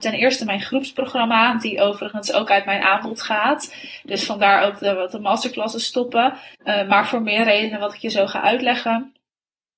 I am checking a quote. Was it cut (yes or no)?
yes